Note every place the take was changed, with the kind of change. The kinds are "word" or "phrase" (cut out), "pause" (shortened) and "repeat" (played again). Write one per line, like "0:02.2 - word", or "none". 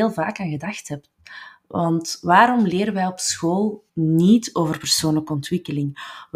0:03.9 - pause